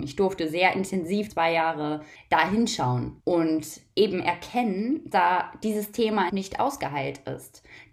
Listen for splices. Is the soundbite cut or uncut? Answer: cut